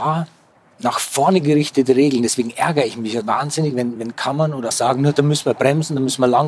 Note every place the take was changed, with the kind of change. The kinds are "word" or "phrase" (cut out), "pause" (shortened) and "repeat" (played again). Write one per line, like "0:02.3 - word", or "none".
0:03.2 - word
0:04.0 - word
0:04.7 - word